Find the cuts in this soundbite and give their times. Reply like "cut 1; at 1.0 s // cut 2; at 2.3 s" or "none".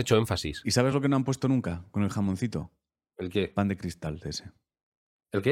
none

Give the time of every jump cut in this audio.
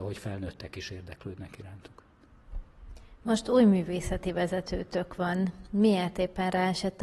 none

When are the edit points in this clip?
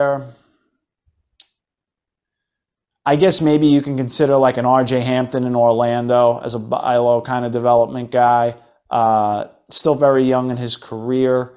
none

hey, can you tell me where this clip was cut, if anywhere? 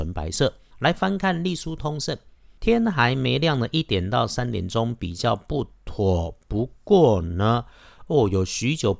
none

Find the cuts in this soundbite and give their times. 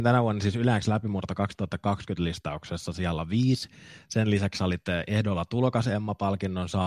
none

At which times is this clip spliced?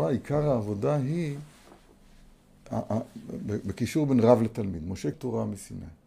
cut 1; at 5.1 s

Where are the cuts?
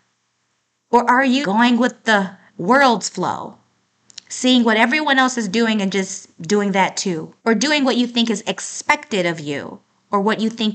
cut 1; at 1.4 s // cut 2; at 2.5 s // cut 3; at 7.4 s

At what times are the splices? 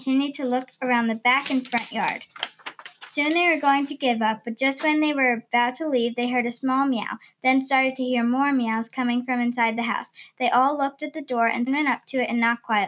cut 1; at 11.7 s

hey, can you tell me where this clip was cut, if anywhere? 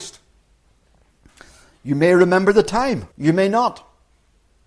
cut 1; at 3.1 s

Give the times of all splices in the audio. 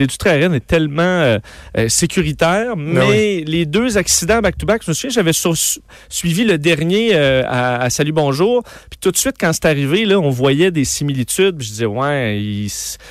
none

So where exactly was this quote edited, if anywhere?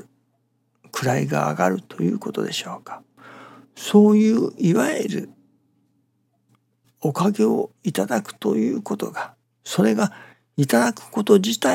cut 1; at 9.4 s

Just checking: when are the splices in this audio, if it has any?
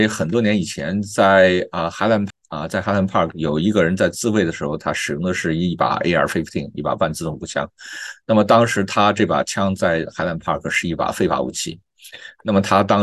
cut 1; at 2.3 s

